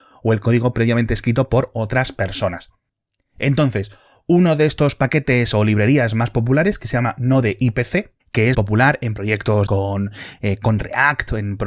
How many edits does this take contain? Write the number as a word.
three